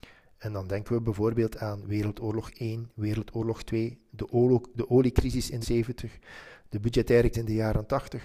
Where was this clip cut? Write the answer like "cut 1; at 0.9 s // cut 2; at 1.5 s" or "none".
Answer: cut 1; at 5.6 s // cut 2; at 7.3 s